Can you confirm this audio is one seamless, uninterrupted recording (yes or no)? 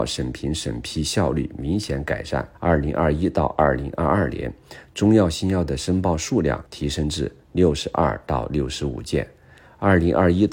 no